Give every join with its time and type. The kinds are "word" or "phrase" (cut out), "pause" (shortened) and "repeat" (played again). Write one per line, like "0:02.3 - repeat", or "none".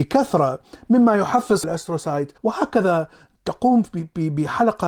0:01.6 - word
0:02.4 - pause

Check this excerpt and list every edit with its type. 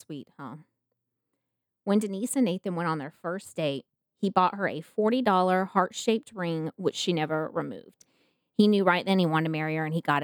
none

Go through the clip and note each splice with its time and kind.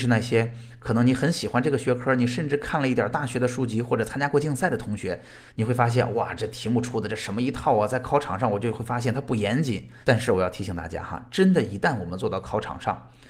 0:05.5 - pause
0:10.0 - pause

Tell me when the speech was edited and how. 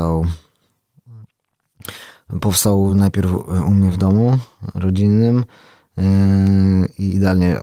none

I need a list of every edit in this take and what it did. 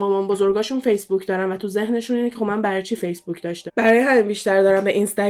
0:03.7 - word

